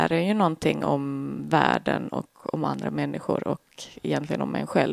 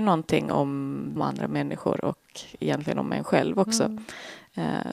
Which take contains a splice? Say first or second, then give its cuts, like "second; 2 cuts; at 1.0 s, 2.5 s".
second; 1 cut; at 1.2 s